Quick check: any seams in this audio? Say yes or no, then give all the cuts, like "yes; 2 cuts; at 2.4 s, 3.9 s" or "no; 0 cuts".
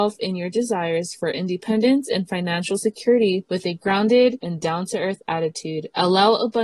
no; 0 cuts